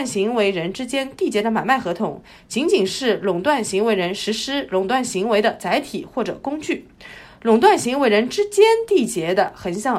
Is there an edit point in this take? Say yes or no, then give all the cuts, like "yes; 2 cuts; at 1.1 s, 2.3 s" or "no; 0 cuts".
no; 0 cuts